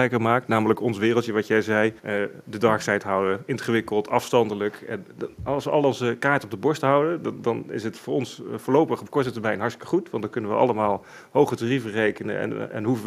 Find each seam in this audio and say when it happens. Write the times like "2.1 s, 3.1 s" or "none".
2.0 s